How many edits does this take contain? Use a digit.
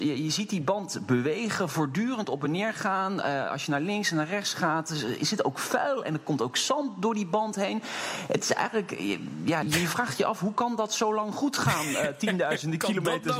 1